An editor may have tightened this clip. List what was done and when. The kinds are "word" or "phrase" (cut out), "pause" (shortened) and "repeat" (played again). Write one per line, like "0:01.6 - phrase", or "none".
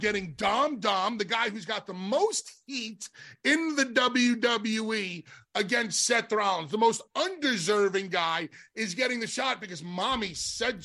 none